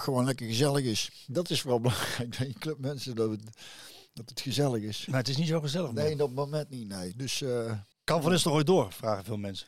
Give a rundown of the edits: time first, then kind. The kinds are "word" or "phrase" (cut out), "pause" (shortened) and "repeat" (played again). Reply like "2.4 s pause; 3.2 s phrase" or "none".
7.9 s pause